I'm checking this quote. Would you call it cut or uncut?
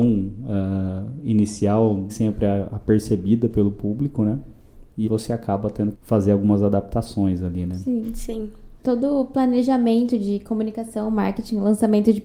cut